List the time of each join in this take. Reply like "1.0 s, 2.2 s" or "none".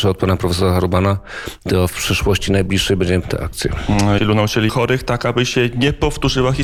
3.2 s, 4.2 s, 4.7 s